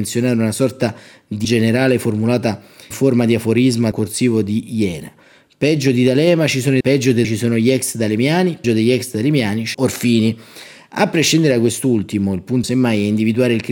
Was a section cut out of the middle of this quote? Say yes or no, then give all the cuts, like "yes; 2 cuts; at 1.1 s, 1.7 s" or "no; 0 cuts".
yes; 8 cuts; at 1.4 s, 2.9 s, 3.9 s, 6.8 s, 7.2 s, 8.6 s, 9.7 s, 12.6 s